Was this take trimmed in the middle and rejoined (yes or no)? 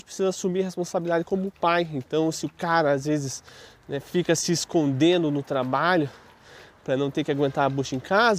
no